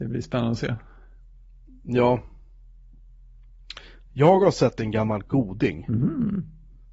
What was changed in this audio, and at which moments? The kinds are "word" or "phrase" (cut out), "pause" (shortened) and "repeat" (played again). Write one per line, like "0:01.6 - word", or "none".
none